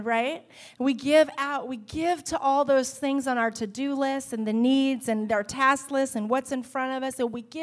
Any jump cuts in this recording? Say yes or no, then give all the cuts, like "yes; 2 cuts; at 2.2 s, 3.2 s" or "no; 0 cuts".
no; 0 cuts